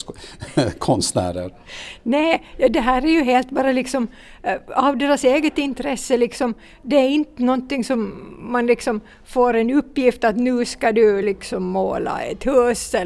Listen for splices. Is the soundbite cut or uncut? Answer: uncut